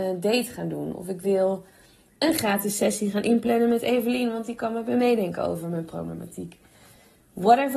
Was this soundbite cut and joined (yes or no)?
no